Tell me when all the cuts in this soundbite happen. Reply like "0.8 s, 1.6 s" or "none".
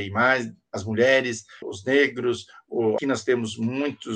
1.6 s, 3.0 s